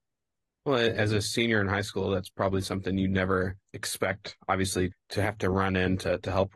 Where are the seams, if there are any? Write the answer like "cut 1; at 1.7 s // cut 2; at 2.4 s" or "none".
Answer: cut 1; at 4.9 s